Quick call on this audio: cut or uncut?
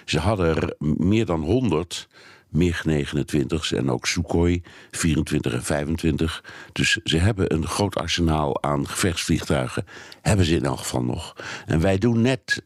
uncut